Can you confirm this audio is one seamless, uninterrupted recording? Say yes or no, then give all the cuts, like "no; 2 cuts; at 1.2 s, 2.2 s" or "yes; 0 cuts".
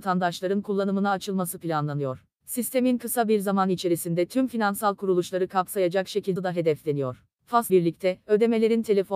no; 2 cuts; at 6.4 s, 7.7 s